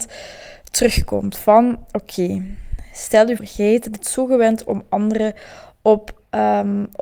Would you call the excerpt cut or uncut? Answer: cut